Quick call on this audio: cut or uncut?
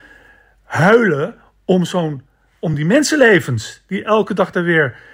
uncut